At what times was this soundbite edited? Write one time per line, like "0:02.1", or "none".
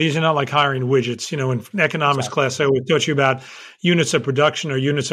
none